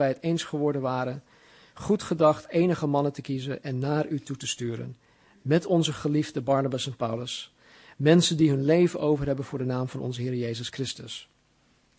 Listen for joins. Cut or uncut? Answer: uncut